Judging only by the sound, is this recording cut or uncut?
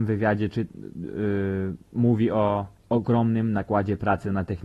cut